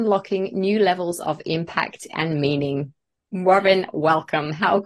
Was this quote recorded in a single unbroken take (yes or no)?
yes